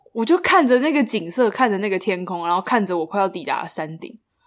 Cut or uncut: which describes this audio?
uncut